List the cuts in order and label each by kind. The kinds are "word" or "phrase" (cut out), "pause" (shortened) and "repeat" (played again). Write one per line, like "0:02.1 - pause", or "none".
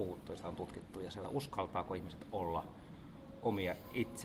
0:01.2 - phrase